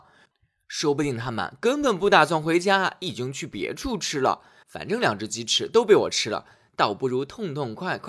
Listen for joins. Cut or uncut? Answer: cut